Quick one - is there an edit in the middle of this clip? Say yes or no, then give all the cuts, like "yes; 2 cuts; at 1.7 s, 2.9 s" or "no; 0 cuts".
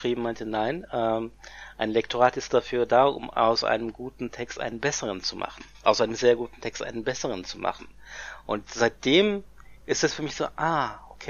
no; 0 cuts